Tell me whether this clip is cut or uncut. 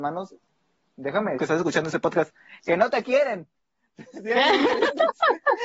cut